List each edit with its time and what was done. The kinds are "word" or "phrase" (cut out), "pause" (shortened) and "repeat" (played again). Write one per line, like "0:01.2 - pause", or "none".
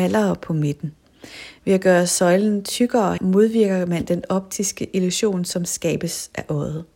0:03.2 - word